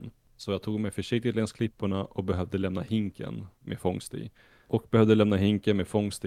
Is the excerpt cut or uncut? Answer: uncut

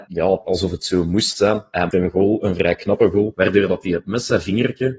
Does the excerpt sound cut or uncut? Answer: cut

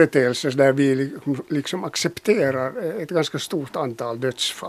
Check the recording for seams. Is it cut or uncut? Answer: uncut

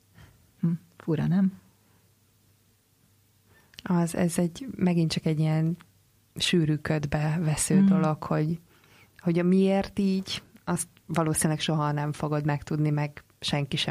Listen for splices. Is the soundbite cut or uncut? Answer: uncut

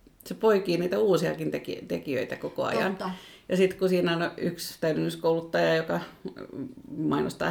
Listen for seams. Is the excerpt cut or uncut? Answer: uncut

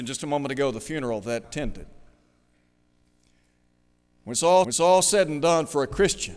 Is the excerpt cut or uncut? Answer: cut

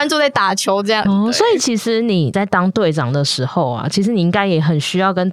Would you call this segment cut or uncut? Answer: uncut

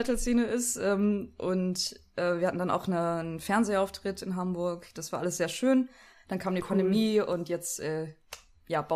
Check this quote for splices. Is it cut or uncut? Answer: uncut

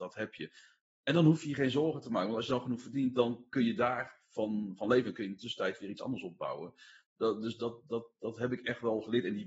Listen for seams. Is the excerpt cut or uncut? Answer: uncut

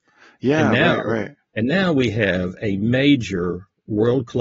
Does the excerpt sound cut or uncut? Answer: uncut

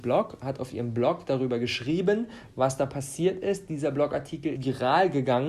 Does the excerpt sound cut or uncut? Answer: cut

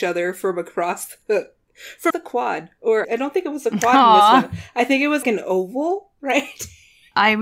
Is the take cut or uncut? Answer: cut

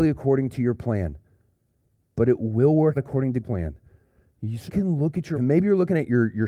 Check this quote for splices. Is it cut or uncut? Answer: cut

